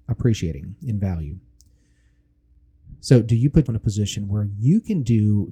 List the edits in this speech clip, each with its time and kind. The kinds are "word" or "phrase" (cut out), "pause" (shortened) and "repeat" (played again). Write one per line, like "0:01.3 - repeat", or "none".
0:03.7 - word